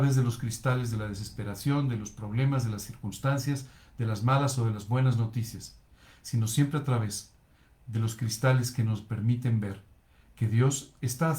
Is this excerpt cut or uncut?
uncut